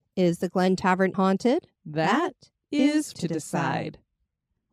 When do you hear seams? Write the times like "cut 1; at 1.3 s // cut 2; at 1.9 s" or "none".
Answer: cut 1; at 1.1 s // cut 2; at 1.8 s // cut 3; at 3.1 s

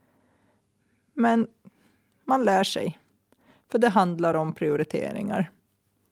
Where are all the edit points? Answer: none

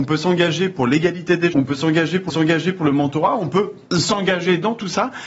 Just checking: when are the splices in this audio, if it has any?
cut 1; at 1.5 s // cut 2; at 2.3 s // cut 3; at 3.9 s

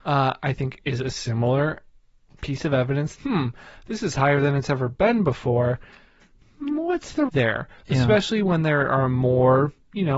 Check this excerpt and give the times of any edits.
cut 1; at 3.2 s // cut 2; at 7.3 s

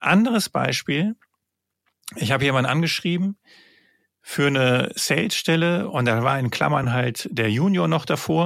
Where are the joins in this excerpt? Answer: none

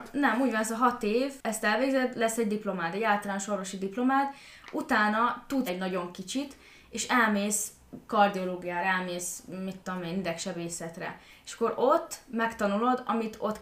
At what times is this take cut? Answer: cut 1; at 5.7 s

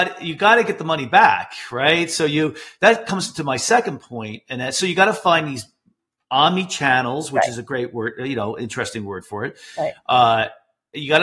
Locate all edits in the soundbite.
none

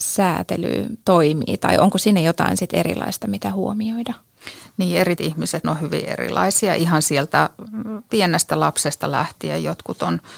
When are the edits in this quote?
cut 1; at 1.0 s // cut 2; at 5.2 s // cut 3; at 5.6 s

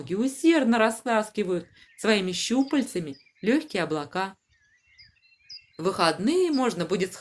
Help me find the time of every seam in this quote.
none

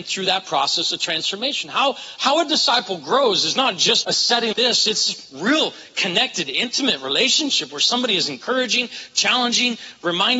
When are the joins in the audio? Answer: cut 1; at 4.0 s // cut 2; at 4.5 s

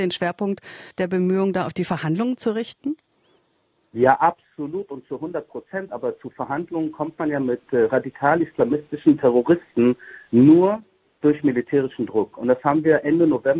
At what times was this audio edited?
cut 1; at 0.9 s

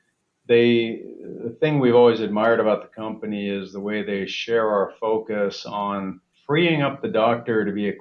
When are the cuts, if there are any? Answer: cut 1; at 6.3 s

